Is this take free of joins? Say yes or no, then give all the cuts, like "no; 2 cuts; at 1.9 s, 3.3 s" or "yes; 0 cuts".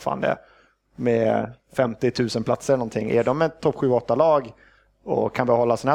yes; 0 cuts